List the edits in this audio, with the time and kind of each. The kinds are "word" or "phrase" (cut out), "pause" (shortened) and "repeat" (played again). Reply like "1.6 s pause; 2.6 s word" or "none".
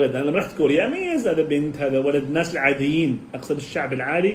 none